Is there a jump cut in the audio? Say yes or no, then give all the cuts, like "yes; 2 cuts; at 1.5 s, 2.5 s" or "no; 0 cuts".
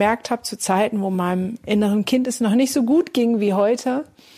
no; 0 cuts